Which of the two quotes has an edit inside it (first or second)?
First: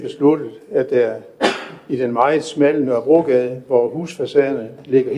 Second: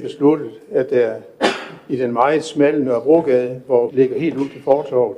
second